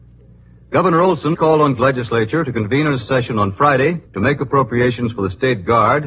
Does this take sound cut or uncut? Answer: cut